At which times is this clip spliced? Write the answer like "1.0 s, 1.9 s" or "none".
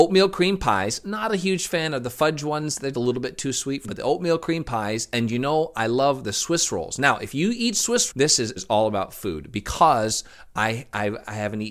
2.9 s, 3.8 s, 8.1 s, 8.6 s